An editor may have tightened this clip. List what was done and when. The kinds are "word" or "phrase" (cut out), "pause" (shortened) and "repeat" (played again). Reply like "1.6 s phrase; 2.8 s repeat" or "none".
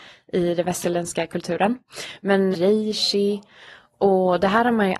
2.5 s phrase